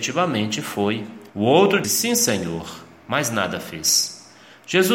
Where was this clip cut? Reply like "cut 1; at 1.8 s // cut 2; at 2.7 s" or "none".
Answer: cut 1; at 1.3 s // cut 2; at 1.8 s